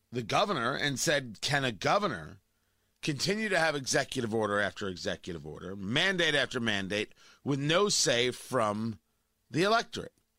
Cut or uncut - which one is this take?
uncut